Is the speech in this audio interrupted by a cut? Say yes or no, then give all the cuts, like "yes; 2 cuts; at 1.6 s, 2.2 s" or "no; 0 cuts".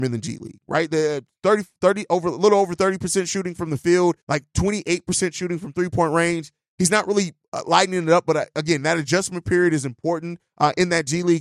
yes; 1 cut; at 4.2 s